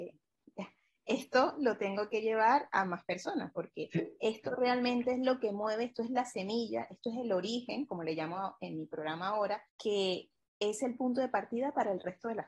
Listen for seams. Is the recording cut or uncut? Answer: cut